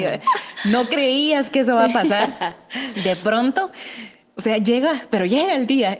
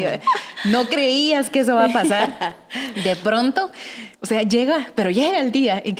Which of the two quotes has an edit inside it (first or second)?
second